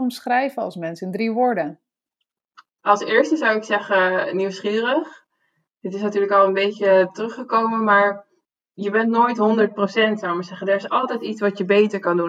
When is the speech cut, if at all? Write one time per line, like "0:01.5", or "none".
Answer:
none